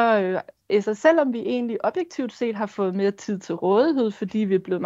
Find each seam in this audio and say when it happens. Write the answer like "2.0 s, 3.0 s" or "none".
none